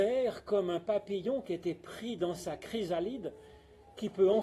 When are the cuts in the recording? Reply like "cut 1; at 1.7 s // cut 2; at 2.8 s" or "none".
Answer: none